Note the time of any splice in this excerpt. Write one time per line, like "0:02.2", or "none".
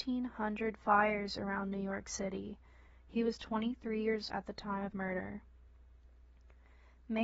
0:04.3
0:04.9